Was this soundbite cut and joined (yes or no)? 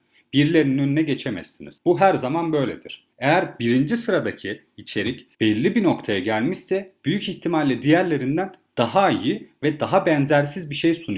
no